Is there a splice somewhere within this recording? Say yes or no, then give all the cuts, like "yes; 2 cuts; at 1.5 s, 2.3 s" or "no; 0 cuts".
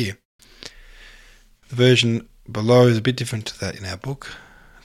no; 0 cuts